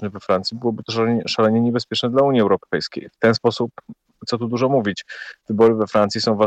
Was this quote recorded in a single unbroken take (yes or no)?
yes